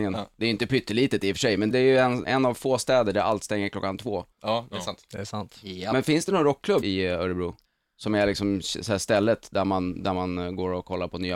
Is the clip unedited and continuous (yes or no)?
no